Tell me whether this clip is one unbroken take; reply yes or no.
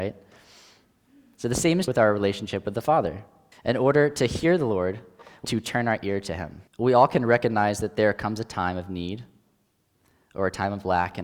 no